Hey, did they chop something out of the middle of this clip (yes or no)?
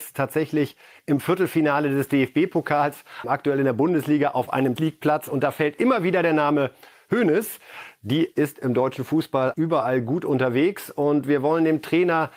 yes